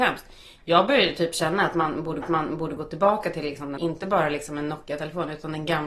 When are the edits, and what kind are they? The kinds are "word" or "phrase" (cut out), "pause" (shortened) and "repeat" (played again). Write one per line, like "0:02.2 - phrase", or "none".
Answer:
0:02.2 - repeat
0:03.8 - word